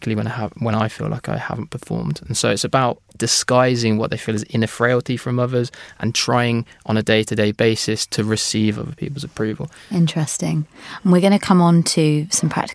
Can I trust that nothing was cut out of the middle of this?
yes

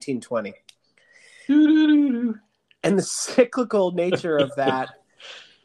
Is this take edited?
no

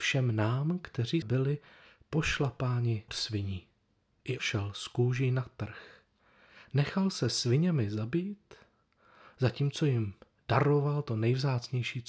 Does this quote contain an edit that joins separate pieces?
yes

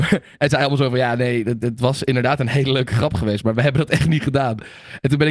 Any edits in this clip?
yes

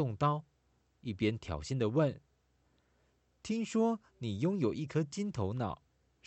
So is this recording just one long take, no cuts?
yes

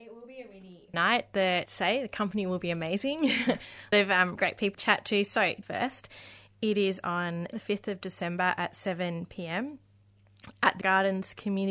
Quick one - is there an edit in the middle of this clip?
yes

